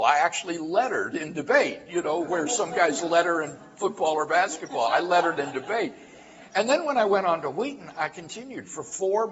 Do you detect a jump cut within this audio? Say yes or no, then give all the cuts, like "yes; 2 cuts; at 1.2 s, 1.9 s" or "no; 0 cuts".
no; 0 cuts